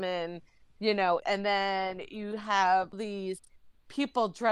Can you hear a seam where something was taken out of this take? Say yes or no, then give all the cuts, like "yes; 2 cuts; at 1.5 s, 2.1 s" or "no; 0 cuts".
yes; 2 cuts; at 1.2 s, 2.9 s